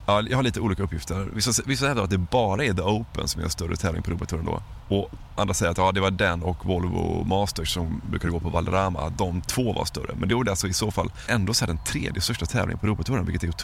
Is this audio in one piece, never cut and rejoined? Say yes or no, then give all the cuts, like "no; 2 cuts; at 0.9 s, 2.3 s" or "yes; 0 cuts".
yes; 0 cuts